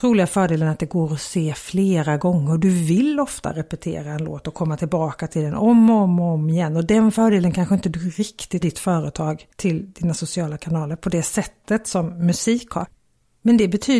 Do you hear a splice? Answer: yes; 1 cut; at 8.6 s

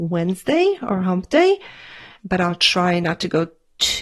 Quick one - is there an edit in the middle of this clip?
no; 0 cuts

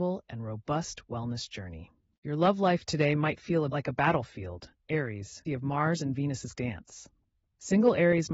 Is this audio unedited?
no; 3 cuts; at 3.7 s, 5.5 s, 6.5 s

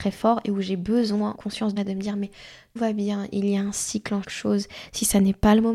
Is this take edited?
yes; 4 cuts; at 1.3 s, 1.8 s, 2.8 s, 4.2 s

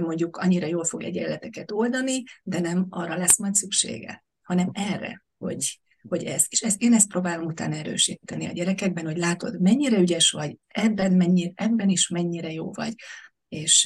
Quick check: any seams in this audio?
yes; 1 cut; at 5.3 s

